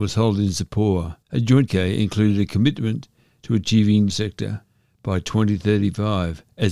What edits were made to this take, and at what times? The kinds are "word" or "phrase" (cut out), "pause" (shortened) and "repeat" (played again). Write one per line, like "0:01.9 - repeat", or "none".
0:01.2 - pause
0:01.7 - word
0:04.1 - phrase